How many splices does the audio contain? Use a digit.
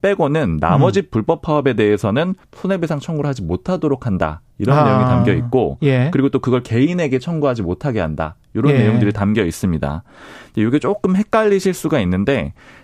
2